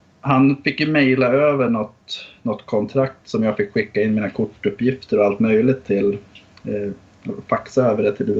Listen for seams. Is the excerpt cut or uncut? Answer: uncut